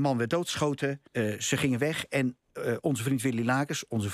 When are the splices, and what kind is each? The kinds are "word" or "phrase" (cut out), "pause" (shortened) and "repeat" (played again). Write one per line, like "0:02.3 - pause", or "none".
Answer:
0:01.1 - pause